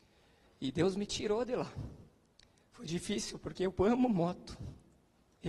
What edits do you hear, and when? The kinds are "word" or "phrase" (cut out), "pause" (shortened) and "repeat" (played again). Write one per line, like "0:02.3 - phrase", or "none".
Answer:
none